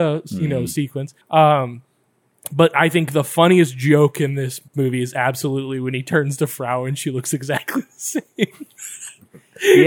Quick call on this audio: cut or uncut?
cut